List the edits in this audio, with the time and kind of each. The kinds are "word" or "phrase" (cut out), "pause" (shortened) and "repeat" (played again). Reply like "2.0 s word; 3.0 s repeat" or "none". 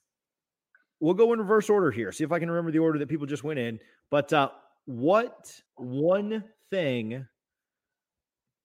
5.7 s pause